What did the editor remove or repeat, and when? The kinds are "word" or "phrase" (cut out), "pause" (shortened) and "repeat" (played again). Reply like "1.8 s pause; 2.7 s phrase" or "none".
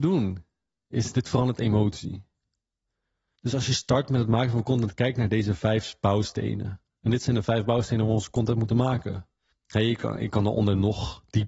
9.5 s pause